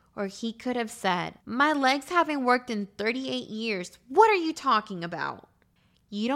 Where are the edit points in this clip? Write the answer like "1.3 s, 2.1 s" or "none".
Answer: 1.4 s